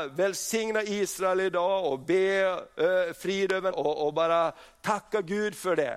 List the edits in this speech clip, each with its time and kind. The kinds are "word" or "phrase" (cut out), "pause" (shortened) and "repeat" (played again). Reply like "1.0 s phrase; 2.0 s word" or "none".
3.7 s phrase